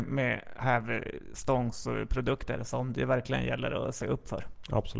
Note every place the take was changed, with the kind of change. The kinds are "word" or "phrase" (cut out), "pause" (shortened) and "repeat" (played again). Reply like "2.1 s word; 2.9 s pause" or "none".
none